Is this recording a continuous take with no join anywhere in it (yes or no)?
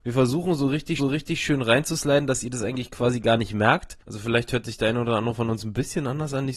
no